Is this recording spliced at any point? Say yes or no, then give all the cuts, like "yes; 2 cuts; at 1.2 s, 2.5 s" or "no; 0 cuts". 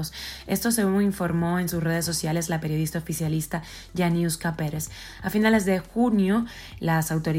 no; 0 cuts